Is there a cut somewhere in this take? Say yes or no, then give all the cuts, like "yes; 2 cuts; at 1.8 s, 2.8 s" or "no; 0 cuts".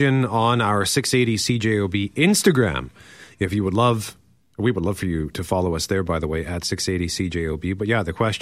no; 0 cuts